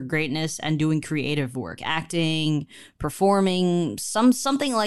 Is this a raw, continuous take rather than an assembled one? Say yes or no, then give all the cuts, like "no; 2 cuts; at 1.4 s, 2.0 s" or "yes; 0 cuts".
no; 1 cut; at 1.8 s